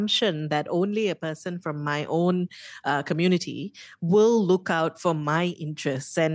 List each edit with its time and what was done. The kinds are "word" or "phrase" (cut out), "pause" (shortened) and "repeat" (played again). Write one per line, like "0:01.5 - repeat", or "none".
none